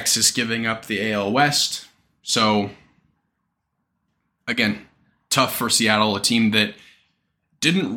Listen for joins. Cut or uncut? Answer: uncut